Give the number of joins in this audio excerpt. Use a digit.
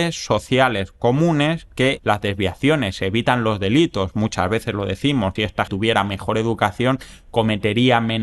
3